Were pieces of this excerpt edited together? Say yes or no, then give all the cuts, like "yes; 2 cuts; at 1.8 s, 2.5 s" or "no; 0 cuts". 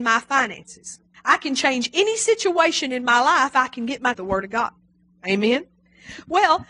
yes; 3 cuts; at 1.1 s, 3.5 s, 4.1 s